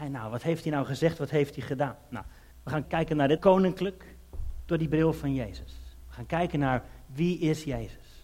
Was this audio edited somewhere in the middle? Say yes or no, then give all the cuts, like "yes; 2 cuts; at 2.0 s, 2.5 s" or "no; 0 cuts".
yes; 3 cuts; at 2.5 s, 2.8 s, 3.4 s